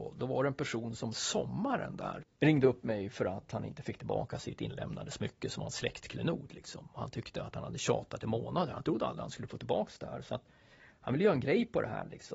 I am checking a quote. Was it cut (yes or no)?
no